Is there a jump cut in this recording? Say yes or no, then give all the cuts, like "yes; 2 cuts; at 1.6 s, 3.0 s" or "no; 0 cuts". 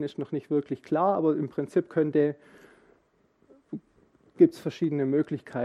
no; 0 cuts